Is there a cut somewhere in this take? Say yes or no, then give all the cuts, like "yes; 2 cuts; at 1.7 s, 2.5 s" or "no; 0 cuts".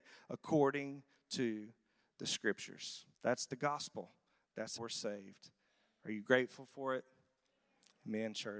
yes; 2 cuts; at 3.1 s, 4.8 s